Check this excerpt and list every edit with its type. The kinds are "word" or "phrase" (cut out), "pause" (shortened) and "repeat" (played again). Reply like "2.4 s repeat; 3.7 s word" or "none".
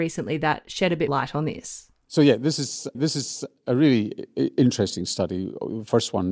1.1 s word; 2.9 s repeat